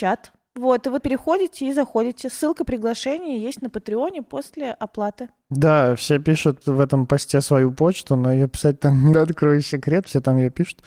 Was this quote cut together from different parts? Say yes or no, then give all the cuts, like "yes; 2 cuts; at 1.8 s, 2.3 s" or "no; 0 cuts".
yes; 3 cuts; at 1.0 s, 6.6 s, 9.1 s